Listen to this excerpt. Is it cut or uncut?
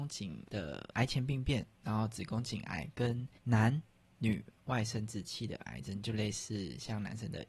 cut